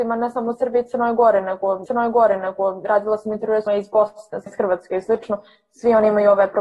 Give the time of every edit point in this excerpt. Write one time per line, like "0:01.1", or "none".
0:01.9
0:03.7
0:04.5